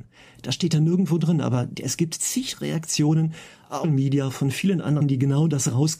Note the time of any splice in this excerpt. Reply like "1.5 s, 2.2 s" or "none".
3.8 s, 5.0 s